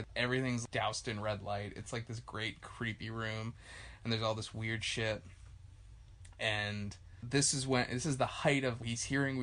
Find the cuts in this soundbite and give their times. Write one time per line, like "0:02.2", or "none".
none